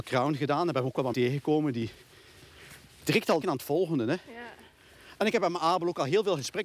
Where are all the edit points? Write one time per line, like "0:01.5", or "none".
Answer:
0:01.1
0:03.1
0:03.4